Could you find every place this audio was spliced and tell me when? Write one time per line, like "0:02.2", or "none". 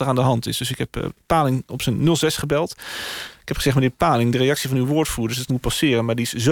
0:05.5

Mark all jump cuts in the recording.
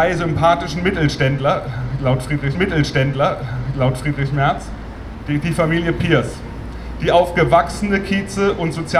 0:02.5

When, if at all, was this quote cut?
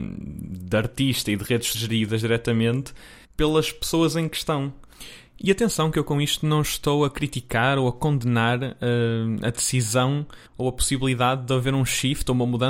0:01.7
0:03.2
0:10.5

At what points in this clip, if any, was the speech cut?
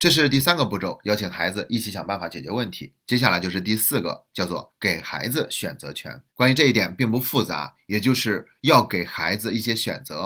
0:06.3

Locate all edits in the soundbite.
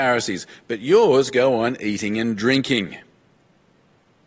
none

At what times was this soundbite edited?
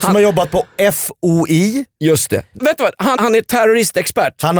0:02.6
0:03.2

